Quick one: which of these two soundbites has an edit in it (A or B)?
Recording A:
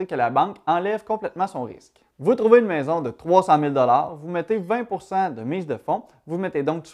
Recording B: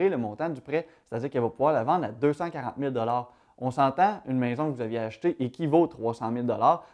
A